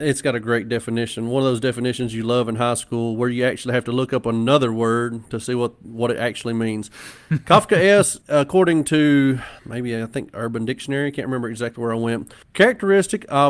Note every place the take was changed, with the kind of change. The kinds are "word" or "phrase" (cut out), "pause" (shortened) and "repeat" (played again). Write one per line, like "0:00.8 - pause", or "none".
0:08.2 - pause
0:09.6 - pause
0:12.4 - pause

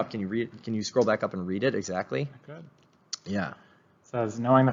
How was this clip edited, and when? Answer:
none

